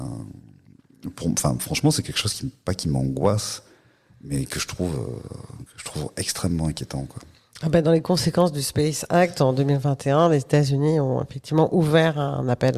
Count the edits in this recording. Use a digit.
0